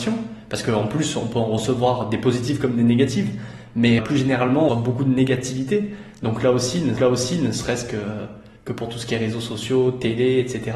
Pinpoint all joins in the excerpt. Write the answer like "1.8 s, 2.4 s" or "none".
4.0 s, 4.7 s, 7.0 s, 8.6 s